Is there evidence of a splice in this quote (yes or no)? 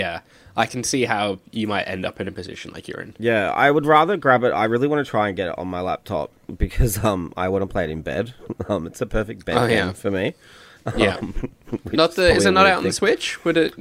no